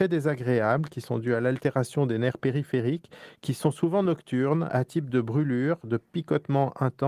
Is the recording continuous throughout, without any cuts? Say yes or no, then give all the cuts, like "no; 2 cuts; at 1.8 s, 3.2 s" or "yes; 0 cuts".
yes; 0 cuts